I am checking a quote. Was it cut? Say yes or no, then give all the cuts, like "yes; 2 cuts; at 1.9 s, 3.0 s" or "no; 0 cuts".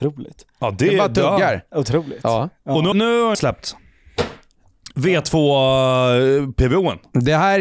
yes; 2 cuts; at 2.9 s, 3.3 s